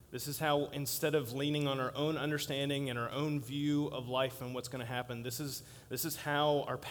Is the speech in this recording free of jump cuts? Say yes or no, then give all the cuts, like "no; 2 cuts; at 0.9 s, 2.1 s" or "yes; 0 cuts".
yes; 0 cuts